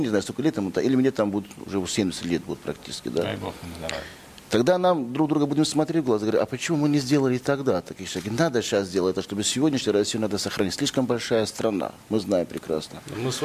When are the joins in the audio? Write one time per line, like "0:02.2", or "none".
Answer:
none